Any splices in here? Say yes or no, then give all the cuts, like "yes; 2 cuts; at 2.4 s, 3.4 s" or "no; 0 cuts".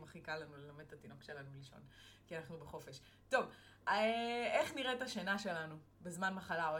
no; 0 cuts